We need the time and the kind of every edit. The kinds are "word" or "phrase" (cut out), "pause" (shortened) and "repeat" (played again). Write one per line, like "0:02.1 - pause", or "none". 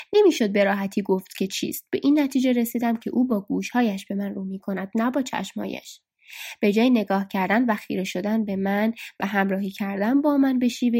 none